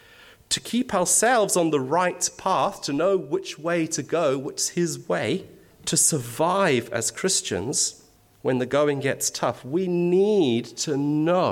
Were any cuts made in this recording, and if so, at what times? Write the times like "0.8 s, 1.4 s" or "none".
5.7 s, 8.2 s

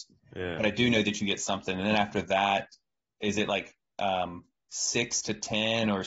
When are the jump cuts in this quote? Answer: none

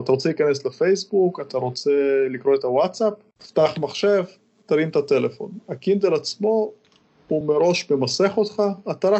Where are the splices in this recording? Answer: none

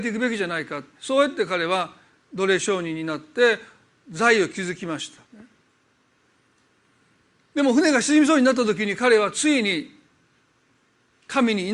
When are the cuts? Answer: 0.9 s, 5.2 s

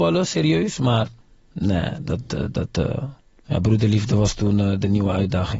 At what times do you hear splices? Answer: 1.2 s, 3.4 s

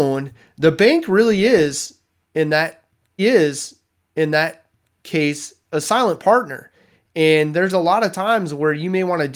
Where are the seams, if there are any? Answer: 3.2 s

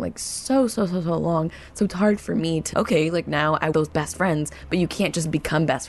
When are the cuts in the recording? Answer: 2.7 s, 3.7 s

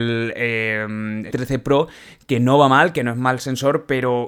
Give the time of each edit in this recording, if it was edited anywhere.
1.3 s

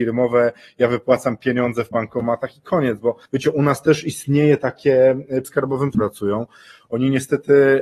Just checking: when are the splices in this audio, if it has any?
1.9 s, 3.3 s, 5.4 s, 5.9 s

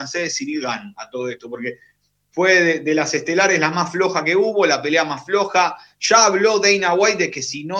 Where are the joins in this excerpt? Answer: none

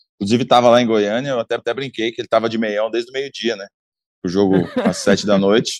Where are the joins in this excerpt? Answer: 1.6 s

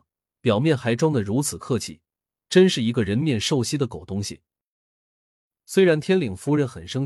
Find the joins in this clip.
none

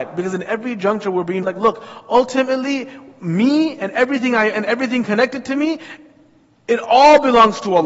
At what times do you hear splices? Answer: 1.4 s, 4.5 s

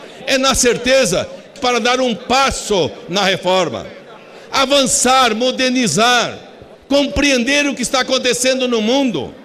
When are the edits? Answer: 1.6 s, 6.7 s

